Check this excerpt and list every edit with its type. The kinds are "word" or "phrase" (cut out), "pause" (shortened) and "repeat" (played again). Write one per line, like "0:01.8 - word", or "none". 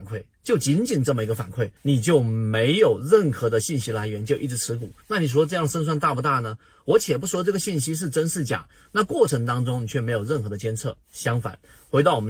0:01.8 - pause
0:05.0 - pause